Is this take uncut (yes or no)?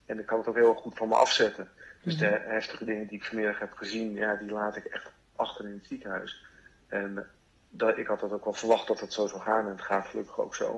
yes